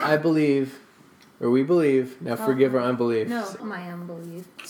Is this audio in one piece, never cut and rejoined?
no; 1 cut; at 3.6 s

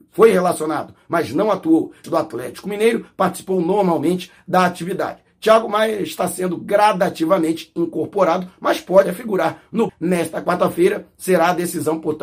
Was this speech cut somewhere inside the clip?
yes; 3 cuts; at 2.0 s, 9.0 s, 9.9 s

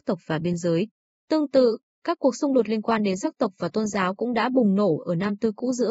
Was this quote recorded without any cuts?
yes; 0 cuts

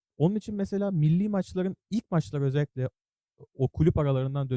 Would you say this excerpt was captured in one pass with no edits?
yes; 0 cuts

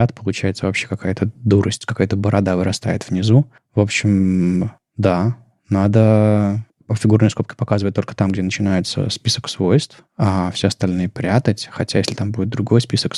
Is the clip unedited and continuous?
yes; 0 cuts

